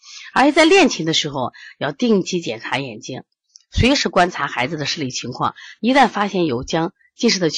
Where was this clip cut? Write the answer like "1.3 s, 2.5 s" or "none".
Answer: none

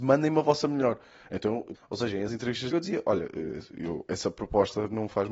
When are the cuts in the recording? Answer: 1.7 s, 2.3 s, 2.7 s

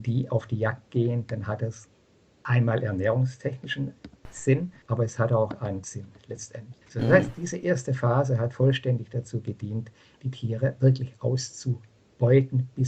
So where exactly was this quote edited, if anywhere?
4.8 s, 5.8 s, 6.8 s

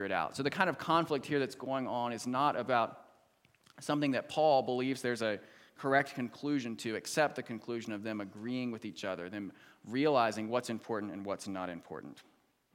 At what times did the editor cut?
none

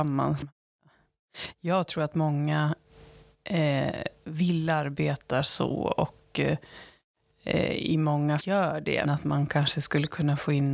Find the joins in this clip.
8.4 s, 9.0 s

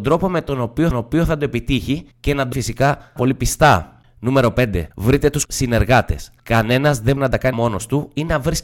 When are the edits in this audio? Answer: 0.9 s, 2.1 s, 2.5 s, 3.2 s, 4.9 s, 5.5 s, 6.4 s, 7.2 s, 7.5 s

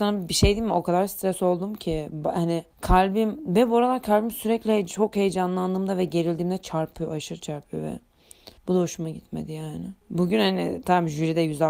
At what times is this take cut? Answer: 2.7 s, 8.6 s, 10.0 s

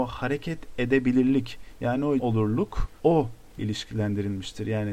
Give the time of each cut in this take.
2.2 s, 3.6 s

